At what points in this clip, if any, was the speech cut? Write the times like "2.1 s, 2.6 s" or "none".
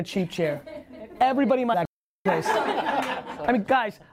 1.7 s